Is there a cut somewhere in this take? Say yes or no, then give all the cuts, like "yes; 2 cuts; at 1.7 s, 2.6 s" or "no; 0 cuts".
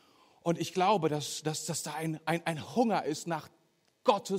no; 0 cuts